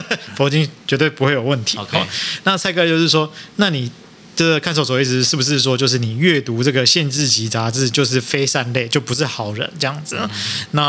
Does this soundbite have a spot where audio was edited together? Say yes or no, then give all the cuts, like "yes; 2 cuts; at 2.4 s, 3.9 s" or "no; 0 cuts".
no; 0 cuts